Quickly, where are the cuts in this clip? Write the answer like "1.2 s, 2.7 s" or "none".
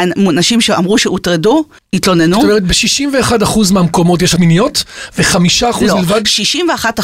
1.8 s, 4.4 s